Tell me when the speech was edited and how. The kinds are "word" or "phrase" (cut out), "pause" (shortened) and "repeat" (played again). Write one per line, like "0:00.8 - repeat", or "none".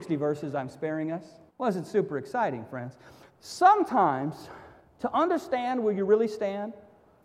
0:01.5 - pause
0:03.3 - pause